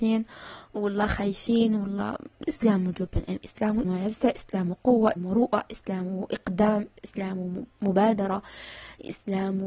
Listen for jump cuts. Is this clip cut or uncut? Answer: cut